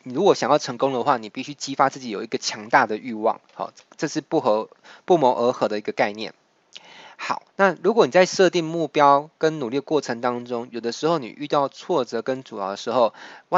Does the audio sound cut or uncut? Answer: cut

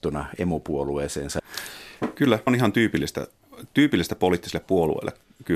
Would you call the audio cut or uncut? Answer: cut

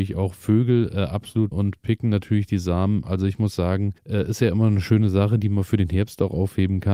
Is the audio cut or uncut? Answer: cut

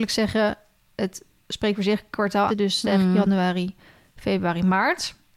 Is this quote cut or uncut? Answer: cut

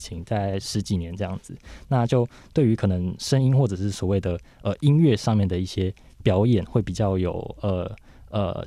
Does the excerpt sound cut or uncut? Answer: uncut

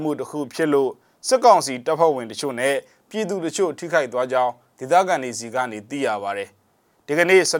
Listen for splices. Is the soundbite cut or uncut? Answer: uncut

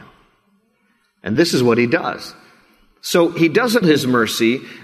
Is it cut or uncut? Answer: cut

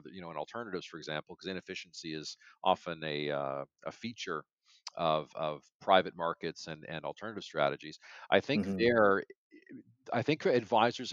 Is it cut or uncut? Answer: uncut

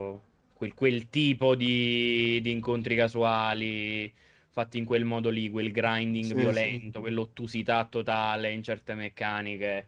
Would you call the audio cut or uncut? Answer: uncut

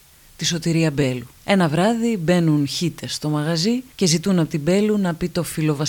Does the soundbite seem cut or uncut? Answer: cut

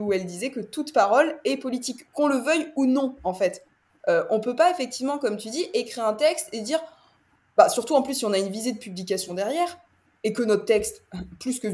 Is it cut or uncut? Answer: uncut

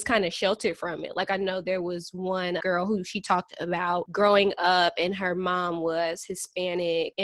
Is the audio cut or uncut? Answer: cut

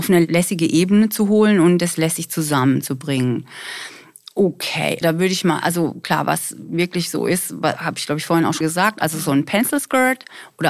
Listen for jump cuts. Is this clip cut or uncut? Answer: cut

